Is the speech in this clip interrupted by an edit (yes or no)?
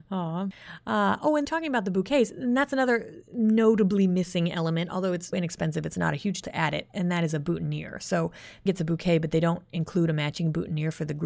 yes